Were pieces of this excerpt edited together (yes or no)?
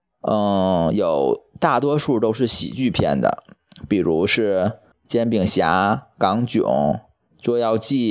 yes